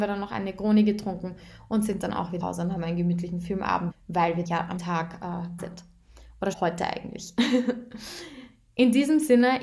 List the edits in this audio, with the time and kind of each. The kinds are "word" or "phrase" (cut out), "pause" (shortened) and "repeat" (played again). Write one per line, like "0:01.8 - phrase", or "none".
0:02.4 - word
0:03.9 - word
0:04.4 - word
0:04.8 - word
0:05.6 - word
0:06.5 - word